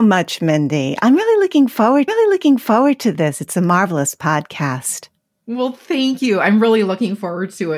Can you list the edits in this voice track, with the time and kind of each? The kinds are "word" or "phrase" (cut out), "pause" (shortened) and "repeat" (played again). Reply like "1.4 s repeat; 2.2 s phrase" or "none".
2.1 s repeat